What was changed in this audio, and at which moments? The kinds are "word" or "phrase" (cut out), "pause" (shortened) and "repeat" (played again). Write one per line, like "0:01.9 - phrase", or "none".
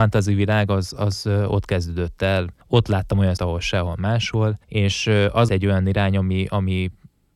0:02.6 - pause
0:03.4 - word
0:04.6 - pause
0:05.5 - word